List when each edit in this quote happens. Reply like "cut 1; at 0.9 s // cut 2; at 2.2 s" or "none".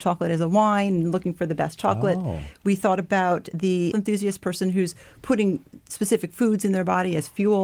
cut 1; at 3.9 s